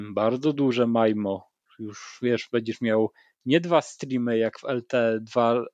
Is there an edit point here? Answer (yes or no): no